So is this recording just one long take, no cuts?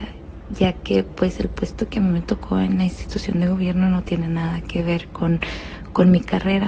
yes; 0 cuts

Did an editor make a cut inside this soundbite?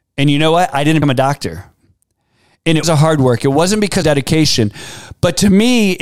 yes; 3 cuts; at 1.0 s, 2.8 s, 4.0 s

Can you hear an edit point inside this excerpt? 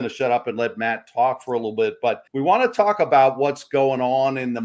yes; 1 cut; at 2.3 s

